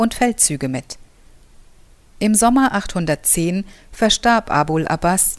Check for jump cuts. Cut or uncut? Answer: uncut